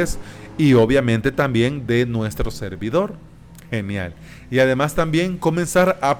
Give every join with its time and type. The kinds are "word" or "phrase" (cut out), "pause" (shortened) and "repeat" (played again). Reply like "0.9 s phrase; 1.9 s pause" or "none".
none